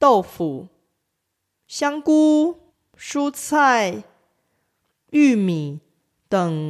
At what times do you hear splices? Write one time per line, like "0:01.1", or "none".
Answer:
0:02.7